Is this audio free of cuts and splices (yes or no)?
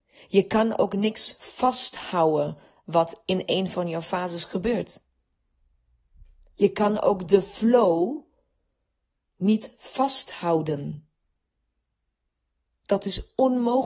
yes